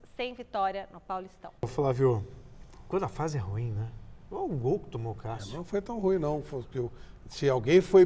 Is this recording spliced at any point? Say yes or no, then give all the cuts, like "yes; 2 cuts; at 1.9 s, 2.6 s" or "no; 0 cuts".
yes; 1 cut; at 1.6 s